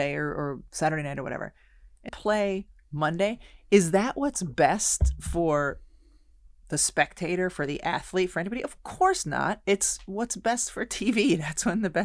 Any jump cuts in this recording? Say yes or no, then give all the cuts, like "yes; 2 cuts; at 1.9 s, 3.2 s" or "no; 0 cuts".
yes; 1 cut; at 2.1 s